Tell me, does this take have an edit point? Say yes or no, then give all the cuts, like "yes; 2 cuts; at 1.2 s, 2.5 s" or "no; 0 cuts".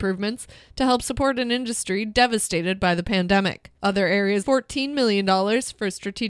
yes; 2 cuts; at 3.8 s, 4.4 s